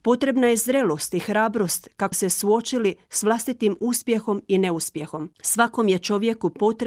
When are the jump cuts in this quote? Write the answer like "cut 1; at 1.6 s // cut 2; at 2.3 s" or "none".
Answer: cut 1; at 2.1 s // cut 2; at 5.3 s

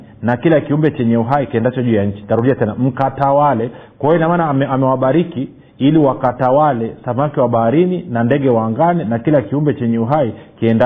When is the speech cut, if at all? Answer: none

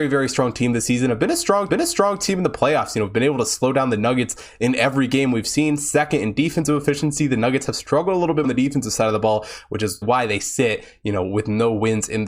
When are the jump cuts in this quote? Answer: cut 1; at 1.7 s // cut 2; at 8.4 s // cut 3; at 10.0 s

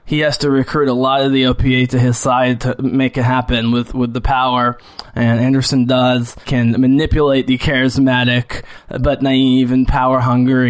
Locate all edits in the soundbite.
cut 1; at 6.4 s

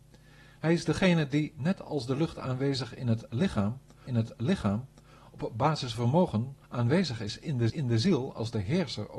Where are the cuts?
cut 1; at 4.1 s // cut 2; at 5.9 s // cut 3; at 6.6 s // cut 4; at 7.7 s

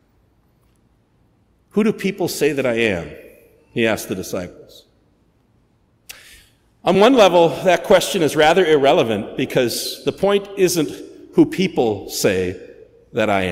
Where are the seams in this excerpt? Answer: none

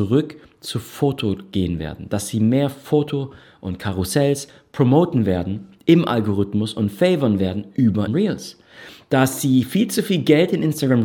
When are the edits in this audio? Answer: cut 1; at 8.1 s

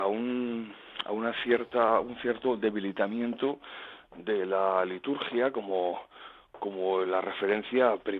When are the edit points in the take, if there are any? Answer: none

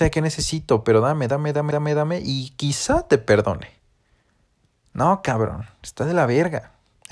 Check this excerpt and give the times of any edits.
cut 1; at 1.7 s

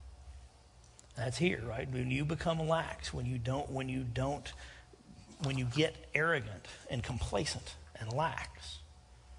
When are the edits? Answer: none

